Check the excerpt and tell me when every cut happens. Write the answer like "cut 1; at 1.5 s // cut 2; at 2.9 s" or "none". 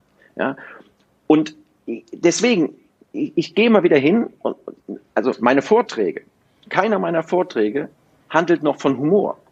none